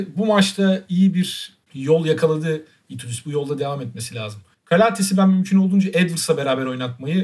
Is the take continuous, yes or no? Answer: no